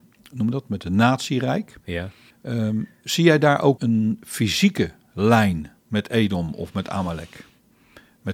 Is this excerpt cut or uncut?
cut